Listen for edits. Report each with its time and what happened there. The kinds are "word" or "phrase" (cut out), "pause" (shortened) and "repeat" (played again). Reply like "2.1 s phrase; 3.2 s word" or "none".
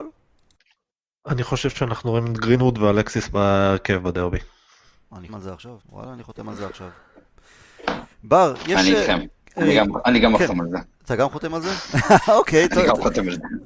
5.3 s word; 5.8 s pause; 10.9 s pause